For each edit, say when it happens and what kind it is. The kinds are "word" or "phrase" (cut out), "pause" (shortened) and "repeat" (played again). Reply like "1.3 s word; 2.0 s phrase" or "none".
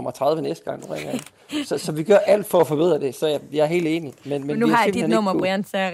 none